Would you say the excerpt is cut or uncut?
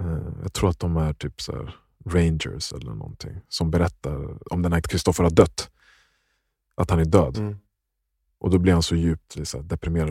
cut